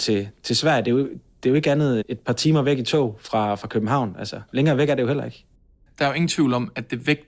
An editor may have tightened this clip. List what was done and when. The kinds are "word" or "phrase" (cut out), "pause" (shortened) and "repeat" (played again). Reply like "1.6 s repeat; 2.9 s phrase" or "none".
2.0 s phrase; 4.5 s pause